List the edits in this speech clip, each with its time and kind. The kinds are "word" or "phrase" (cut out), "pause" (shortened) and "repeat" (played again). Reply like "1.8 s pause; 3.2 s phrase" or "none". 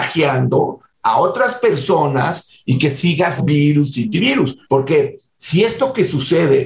3.4 s word; 4.1 s word; 4.6 s pause